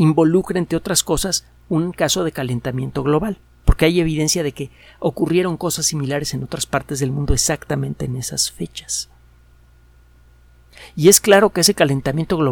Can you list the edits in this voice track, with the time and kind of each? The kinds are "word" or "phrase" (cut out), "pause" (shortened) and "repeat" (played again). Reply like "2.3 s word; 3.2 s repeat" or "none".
none